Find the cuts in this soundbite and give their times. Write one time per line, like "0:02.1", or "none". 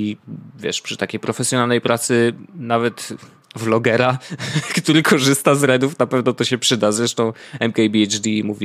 none